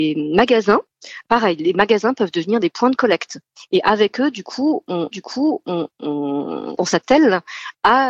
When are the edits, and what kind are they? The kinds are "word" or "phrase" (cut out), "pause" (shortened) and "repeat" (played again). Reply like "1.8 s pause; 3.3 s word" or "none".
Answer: 5.1 s repeat